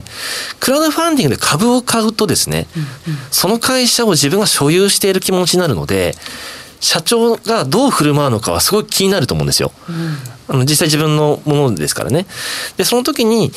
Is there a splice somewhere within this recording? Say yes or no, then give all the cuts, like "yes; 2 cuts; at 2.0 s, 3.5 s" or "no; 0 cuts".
yes; 1 cut; at 3.0 s